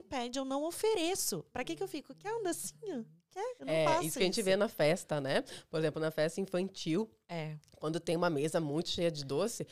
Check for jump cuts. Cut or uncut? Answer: cut